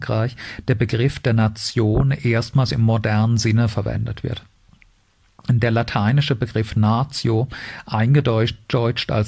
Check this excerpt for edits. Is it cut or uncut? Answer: uncut